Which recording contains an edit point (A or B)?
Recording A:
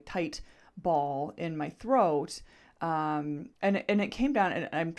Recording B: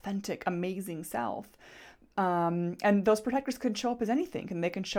A